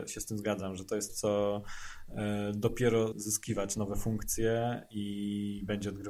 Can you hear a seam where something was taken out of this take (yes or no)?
yes